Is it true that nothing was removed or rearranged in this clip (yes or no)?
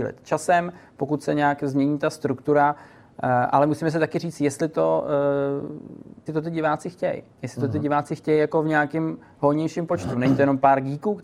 no